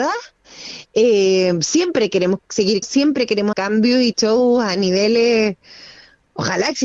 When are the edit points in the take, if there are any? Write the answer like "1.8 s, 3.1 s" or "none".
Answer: 2.8 s, 3.5 s, 4.1 s